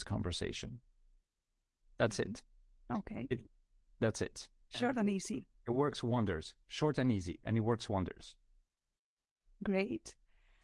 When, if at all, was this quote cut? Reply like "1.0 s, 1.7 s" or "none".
none